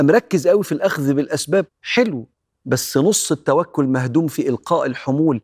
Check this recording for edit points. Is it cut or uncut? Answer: cut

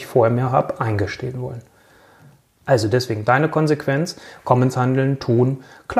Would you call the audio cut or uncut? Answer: uncut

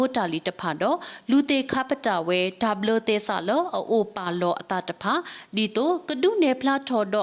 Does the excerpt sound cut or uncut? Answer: uncut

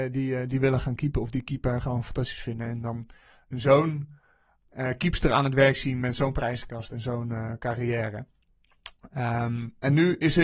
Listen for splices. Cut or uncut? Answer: uncut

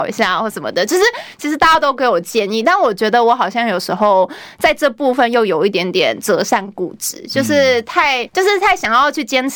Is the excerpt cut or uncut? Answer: cut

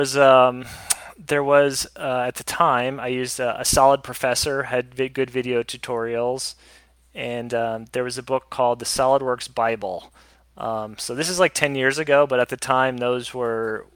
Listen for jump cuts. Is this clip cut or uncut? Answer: uncut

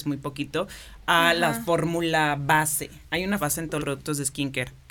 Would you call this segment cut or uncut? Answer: cut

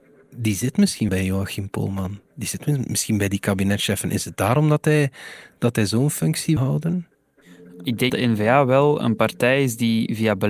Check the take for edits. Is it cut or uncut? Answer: cut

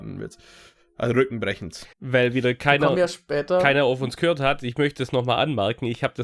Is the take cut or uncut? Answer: cut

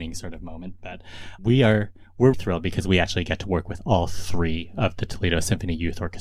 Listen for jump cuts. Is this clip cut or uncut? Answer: cut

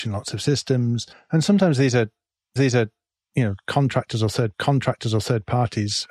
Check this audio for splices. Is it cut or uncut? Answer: cut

